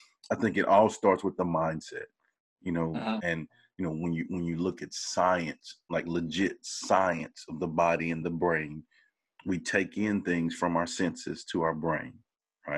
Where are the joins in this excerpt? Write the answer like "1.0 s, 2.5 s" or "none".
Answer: none